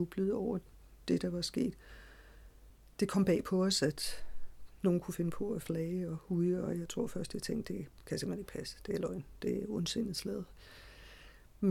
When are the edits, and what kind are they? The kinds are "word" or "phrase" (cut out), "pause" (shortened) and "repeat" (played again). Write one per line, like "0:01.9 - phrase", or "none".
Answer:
none